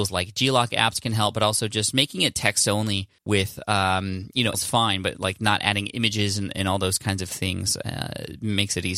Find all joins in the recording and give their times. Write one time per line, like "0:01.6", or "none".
0:03.2
0:04.5